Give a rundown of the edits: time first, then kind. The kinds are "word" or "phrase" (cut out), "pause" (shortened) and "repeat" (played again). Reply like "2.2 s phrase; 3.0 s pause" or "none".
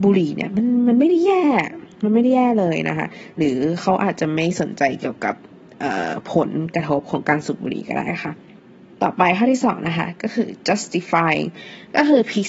none